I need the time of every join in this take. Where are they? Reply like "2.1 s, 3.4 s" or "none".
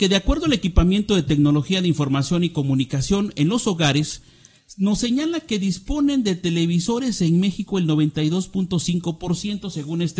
none